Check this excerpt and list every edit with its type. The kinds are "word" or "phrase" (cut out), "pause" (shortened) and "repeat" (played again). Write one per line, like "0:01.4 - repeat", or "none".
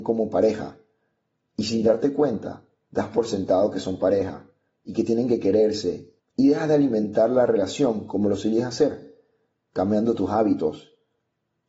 0:06.2 - pause